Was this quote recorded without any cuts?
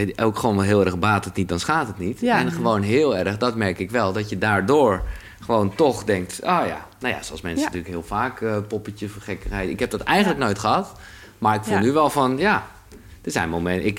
yes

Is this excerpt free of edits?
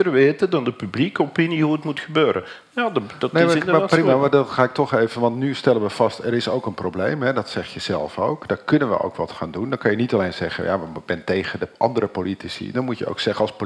yes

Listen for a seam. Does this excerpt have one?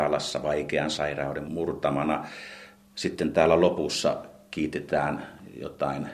no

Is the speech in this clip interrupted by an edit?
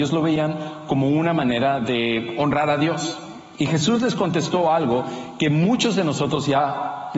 no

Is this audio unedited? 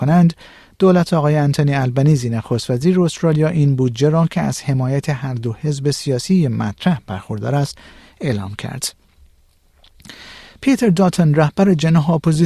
yes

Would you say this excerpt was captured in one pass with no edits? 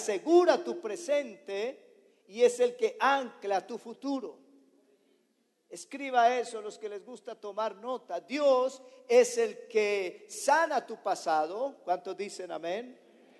yes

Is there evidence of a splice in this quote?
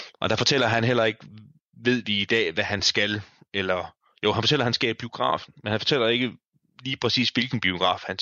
no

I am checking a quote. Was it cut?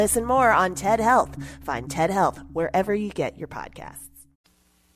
no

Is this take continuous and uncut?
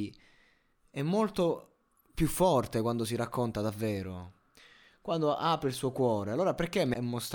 yes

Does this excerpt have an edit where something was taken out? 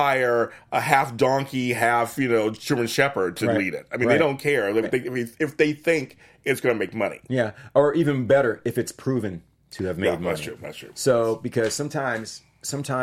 yes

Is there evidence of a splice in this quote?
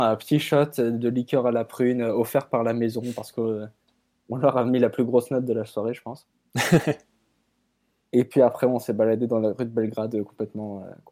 no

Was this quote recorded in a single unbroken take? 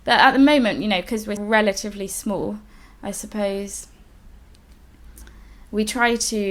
no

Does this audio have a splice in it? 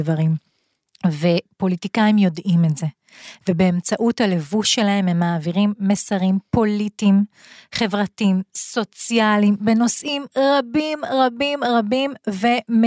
no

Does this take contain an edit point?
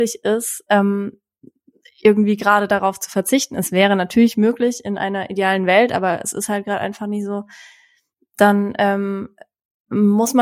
no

